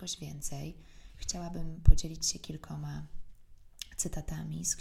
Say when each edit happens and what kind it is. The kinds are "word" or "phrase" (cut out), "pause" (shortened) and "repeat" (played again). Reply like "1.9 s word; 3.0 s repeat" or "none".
none